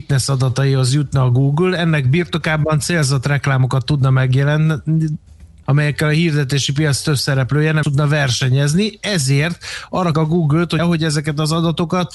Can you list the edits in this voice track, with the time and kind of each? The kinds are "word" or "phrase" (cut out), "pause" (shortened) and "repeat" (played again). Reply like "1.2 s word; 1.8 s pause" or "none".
5.6 s word; 7.8 s word; 10.1 s word; 10.8 s word